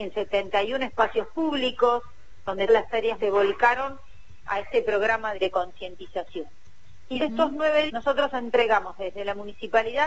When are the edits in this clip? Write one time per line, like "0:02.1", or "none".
0:02.7
0:03.2
0:04.5
0:05.3
0:07.2
0:07.9